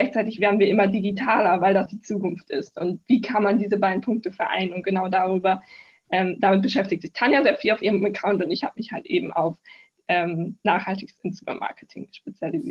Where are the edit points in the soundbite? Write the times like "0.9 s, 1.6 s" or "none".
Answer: 1.9 s

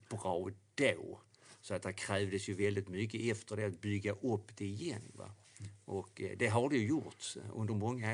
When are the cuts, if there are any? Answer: none

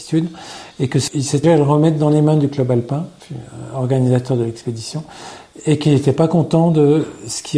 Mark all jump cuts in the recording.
1.1 s, 1.4 s

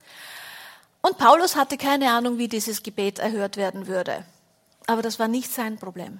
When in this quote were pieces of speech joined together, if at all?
none

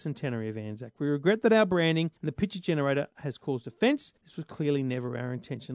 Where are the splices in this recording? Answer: 2.2 s, 4.2 s

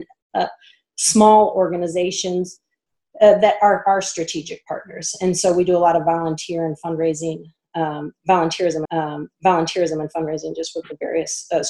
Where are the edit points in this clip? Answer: 8.9 s

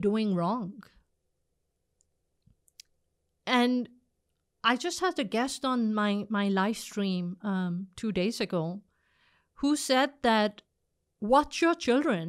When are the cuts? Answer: none

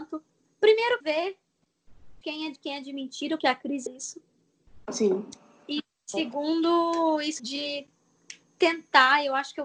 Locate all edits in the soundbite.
1.0 s, 2.2 s, 2.6 s, 3.4 s, 3.9 s, 7.4 s

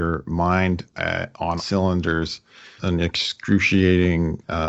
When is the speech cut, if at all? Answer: 0.9 s, 1.6 s, 2.8 s

